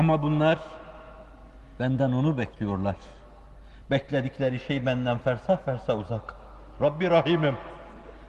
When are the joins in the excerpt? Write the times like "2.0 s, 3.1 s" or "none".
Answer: none

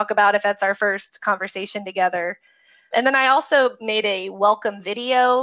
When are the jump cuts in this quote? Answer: 2.9 s

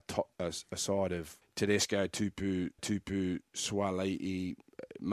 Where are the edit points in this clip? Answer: 1.4 s, 2.8 s

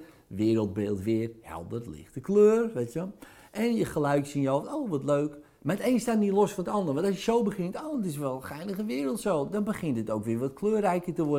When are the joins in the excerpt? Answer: none

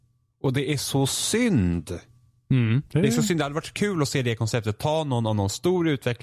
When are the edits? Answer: 2.9 s

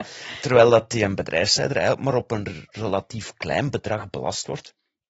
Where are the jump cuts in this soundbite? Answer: none

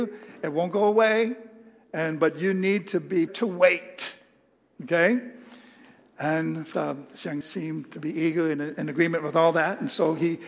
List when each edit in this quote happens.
3.3 s, 6.7 s, 7.4 s

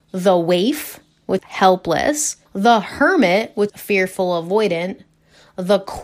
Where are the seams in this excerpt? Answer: 1.4 s, 2.5 s, 3.7 s

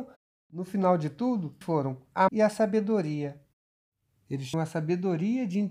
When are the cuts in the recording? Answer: 1.6 s, 2.3 s, 4.5 s

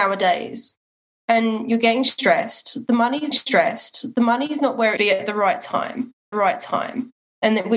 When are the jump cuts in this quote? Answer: 3.3 s, 5.0 s, 6.3 s

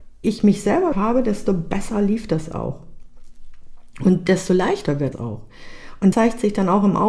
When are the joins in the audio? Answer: 0.9 s, 5.1 s, 6.1 s

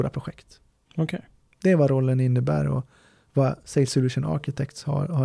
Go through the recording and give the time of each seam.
none

